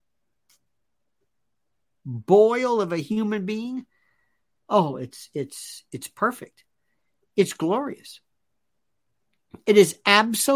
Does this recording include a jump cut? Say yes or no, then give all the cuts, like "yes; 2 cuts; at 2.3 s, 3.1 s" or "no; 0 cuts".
no; 0 cuts